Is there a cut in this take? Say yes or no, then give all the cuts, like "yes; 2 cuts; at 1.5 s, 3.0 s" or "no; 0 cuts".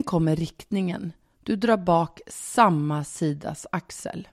no; 0 cuts